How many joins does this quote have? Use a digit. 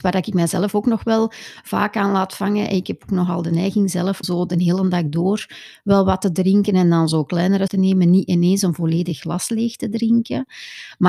2